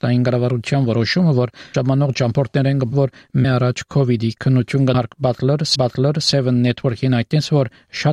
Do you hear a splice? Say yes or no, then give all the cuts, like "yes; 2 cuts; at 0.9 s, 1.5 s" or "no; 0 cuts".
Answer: yes; 5 cuts; at 1.7 s, 2.9 s, 3.4 s, 4.9 s, 5.8 s